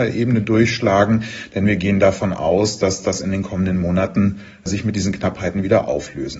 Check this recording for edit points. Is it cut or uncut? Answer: uncut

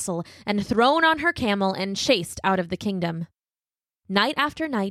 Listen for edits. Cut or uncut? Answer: uncut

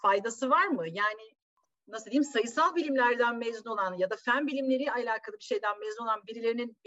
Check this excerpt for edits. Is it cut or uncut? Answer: uncut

